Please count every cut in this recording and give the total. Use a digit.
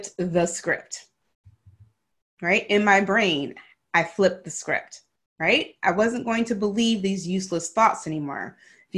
0